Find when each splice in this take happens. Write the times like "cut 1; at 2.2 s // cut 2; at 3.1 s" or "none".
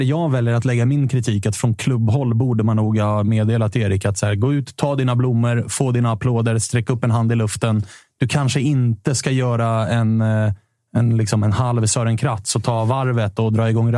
none